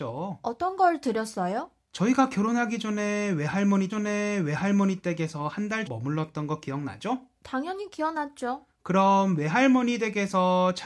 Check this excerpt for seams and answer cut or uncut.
cut